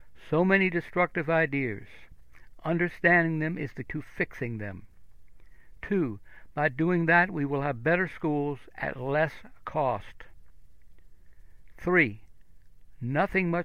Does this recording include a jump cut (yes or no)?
yes